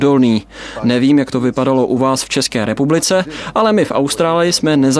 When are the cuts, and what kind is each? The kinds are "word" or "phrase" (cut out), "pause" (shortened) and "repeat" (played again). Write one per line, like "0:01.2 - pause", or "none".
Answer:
none